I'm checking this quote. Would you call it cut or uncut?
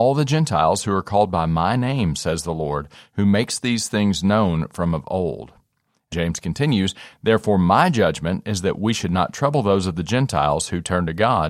cut